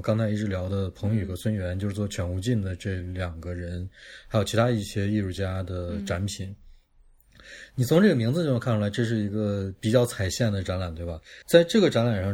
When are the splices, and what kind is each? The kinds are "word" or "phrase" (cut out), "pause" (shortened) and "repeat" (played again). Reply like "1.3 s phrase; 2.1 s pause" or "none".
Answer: 11.4 s pause

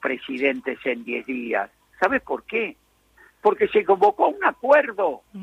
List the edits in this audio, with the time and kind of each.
none

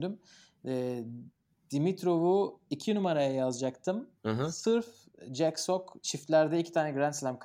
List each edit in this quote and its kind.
4.2 s pause

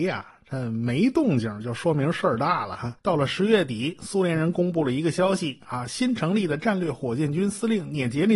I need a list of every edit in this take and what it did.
3.0 s pause

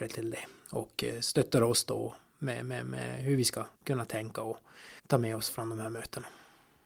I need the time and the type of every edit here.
3.7 s pause; 5.0 s pause

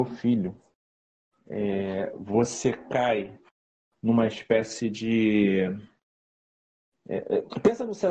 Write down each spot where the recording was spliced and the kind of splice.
none

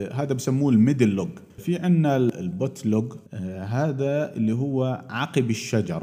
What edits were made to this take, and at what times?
1.6 s word; 3.3 s pause

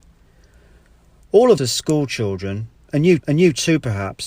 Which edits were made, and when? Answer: 1.6 s word; 3.2 s repeat

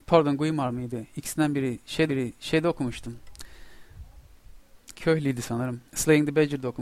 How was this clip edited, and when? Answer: 2.1 s repeat; 5.9 s pause

